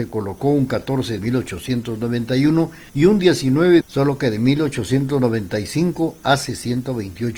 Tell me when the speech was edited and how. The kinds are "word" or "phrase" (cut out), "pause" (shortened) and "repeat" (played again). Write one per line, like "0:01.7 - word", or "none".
0:01.2 - phrase
0:02.9 - pause
0:03.8 - phrase